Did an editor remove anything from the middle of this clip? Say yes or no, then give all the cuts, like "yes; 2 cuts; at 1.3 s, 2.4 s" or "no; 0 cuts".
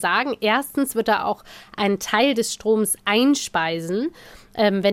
no; 0 cuts